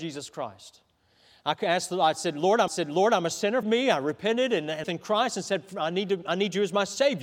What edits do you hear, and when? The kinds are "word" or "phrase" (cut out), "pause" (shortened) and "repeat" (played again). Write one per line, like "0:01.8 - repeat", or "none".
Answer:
0:02.7 - repeat
0:03.6 - word
0:04.8 - phrase